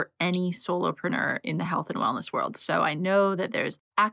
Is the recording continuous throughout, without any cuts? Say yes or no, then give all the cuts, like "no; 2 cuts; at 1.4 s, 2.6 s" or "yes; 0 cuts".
yes; 0 cuts